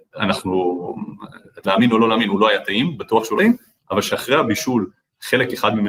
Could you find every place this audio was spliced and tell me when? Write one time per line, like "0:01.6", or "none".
0:01.6
0:03.4